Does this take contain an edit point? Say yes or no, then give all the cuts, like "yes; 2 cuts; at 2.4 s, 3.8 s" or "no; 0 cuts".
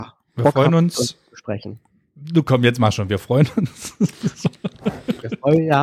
no; 0 cuts